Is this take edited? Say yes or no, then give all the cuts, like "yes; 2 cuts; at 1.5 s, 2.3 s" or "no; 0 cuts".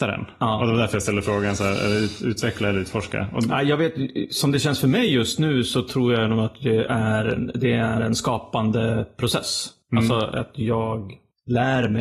no; 0 cuts